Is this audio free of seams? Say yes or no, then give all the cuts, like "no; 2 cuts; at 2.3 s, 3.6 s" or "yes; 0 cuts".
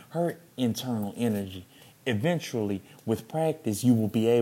yes; 0 cuts